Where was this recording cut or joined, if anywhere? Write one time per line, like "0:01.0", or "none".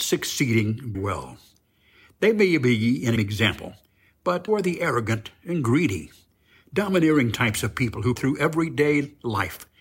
0:00.9
0:03.2
0:04.5
0:08.2